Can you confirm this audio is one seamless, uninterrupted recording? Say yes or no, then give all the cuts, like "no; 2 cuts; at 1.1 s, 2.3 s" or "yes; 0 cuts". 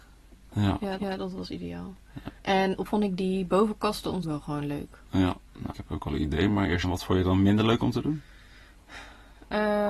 no; 6 cuts; at 1.0 s, 2.4 s, 2.9 s, 4.2 s, 5.7 s, 6.8 s